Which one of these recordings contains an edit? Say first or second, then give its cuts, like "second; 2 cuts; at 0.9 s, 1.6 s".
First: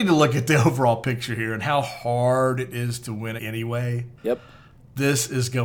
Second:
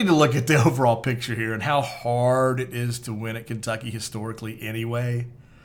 first; 2 cuts; at 3.4 s, 4.2 s